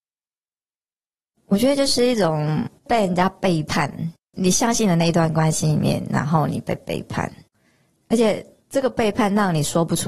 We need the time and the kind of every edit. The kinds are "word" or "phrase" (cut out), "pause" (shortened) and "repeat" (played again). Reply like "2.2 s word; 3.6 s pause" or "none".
2.8 s pause; 4.2 s pause